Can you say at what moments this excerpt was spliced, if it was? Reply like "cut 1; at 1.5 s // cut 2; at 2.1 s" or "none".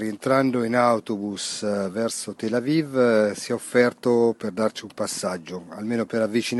none